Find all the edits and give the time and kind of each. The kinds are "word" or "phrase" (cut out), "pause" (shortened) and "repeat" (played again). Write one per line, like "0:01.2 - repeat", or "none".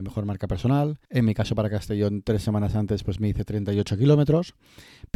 0:01.0 - pause